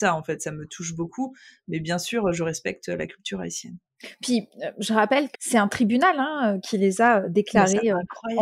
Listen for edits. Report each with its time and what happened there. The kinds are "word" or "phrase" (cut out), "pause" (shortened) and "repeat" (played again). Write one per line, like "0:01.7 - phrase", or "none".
0:05.3 - word